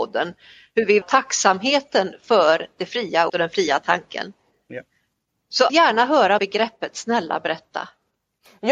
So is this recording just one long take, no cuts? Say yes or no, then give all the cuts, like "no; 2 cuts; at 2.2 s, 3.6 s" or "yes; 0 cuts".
no; 4 cuts; at 1.0 s, 3.3 s, 5.7 s, 6.4 s